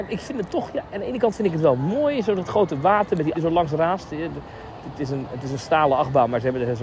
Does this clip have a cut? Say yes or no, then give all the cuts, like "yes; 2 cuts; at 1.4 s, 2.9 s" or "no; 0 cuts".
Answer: yes; 1 cut; at 3.3 s